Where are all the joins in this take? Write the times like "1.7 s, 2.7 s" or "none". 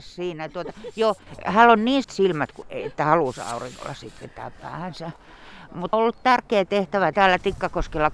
2.0 s, 2.6 s, 5.9 s, 7.1 s